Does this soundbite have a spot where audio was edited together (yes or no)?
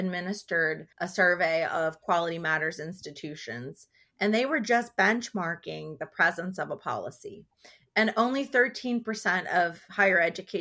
yes